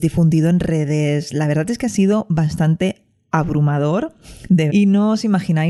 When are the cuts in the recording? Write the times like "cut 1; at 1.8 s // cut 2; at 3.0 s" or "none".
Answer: cut 1; at 4.7 s